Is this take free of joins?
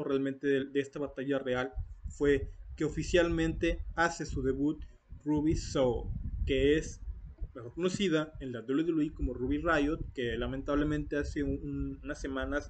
yes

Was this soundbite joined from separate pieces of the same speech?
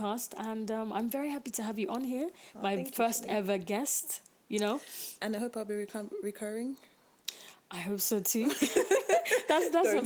no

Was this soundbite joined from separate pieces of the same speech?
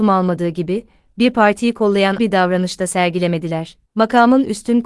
yes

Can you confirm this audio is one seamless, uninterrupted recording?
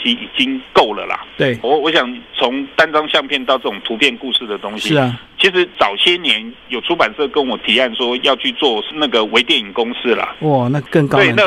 no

